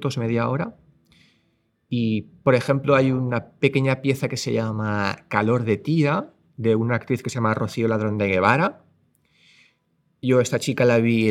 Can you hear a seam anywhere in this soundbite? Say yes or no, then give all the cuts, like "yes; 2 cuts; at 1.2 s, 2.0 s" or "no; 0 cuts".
no; 0 cuts